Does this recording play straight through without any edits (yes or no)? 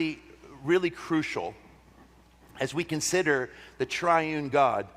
yes